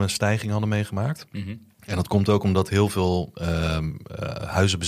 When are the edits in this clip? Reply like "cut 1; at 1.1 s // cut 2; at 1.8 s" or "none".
cut 1; at 1.7 s